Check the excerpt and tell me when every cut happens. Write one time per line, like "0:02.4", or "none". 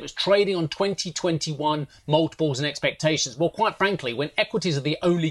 none